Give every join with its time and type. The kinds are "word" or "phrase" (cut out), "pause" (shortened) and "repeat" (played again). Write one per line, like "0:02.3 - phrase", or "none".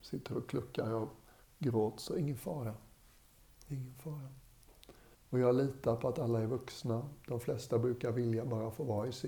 0:01.4 - pause
0:05.1 - pause